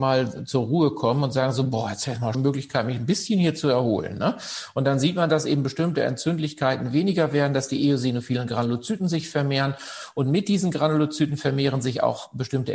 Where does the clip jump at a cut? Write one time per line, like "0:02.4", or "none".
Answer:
0:02.3